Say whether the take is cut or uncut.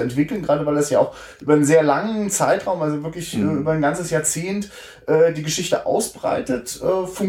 uncut